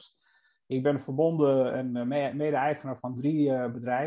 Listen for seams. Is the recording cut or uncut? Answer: uncut